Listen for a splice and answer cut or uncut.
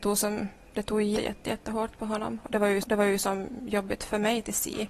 cut